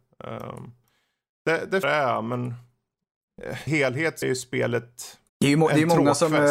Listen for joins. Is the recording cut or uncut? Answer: cut